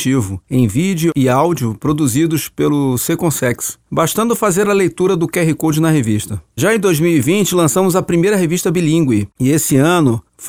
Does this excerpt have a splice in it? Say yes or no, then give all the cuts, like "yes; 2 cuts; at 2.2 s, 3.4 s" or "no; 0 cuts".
no; 0 cuts